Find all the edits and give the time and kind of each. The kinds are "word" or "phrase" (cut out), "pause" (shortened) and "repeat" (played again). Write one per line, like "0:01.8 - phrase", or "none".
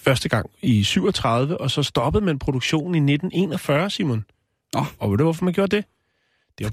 none